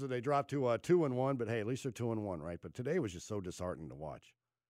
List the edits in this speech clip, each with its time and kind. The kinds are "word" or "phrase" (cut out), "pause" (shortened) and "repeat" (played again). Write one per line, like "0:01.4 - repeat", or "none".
none